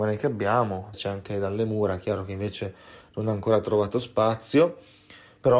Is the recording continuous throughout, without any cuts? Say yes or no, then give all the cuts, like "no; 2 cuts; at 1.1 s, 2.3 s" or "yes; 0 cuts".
no; 1 cut; at 0.9 s